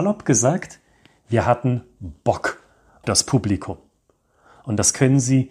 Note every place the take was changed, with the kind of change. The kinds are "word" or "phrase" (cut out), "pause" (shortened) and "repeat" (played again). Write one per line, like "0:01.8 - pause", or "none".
0:03.0 - word